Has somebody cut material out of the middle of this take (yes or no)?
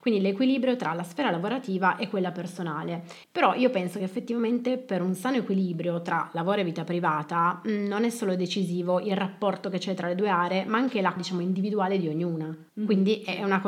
yes